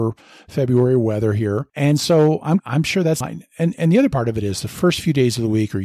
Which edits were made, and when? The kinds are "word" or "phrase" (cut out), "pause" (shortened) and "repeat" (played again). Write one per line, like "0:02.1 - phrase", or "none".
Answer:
0:01.7 - pause
0:02.6 - phrase
0:03.2 - phrase